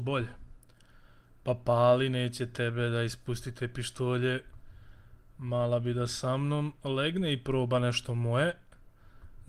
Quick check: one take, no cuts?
yes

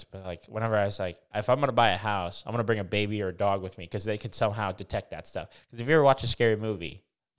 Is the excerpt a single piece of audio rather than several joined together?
yes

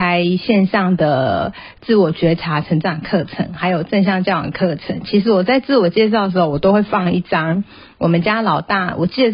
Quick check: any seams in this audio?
no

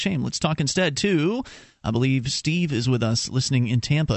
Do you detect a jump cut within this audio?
no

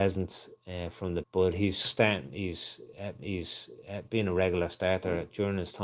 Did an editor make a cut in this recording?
yes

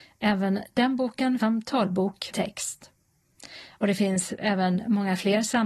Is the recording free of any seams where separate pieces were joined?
no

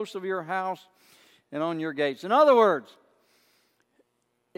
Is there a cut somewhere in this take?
no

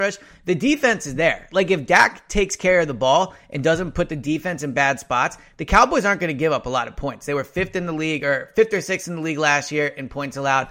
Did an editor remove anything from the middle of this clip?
no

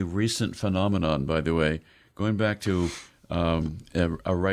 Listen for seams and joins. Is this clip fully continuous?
yes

